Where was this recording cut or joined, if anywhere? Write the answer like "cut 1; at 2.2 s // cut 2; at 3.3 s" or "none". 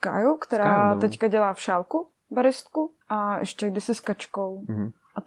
cut 1; at 3.0 s